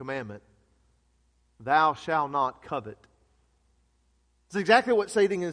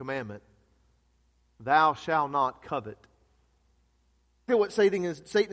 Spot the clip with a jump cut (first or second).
second